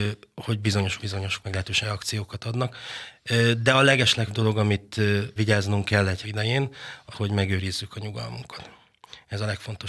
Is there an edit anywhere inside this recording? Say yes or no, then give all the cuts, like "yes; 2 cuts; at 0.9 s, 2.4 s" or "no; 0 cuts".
yes; 7 cuts; at 1.0 s, 1.4 s, 1.8 s, 4.3 s, 5.4 s, 6.2 s, 7.1 s